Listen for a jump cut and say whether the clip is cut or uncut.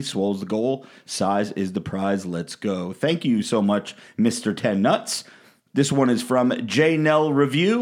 uncut